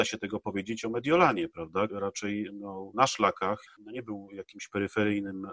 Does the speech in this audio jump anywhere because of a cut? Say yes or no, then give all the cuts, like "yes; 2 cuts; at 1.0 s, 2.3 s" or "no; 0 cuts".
yes; 3 cuts; at 1.9 s, 2.9 s, 3.7 s